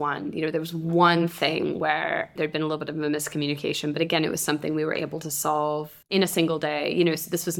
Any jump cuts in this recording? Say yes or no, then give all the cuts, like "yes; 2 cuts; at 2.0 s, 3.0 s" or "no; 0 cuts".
yes; 1 cut; at 6.0 s